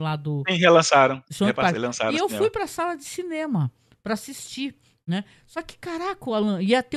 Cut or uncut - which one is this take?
uncut